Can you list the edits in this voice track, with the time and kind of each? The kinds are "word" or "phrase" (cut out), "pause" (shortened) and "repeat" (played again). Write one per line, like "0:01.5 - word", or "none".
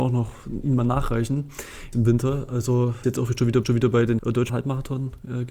0:01.9 - word
0:03.0 - word
0:03.6 - repeat
0:04.2 - word
0:04.5 - word